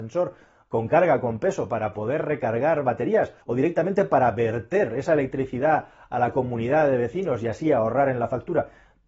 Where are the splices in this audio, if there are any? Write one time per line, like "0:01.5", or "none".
0:03.4